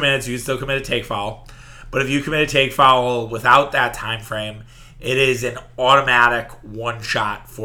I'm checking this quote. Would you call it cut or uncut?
uncut